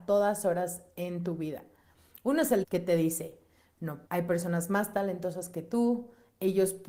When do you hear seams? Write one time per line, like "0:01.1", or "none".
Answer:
0:02.6
0:04.1